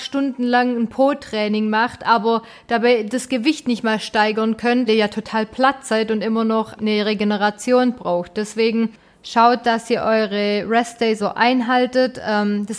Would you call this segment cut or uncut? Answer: cut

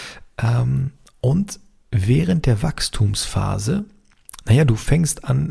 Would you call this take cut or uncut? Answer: uncut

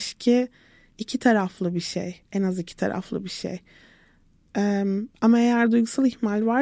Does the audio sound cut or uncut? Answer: cut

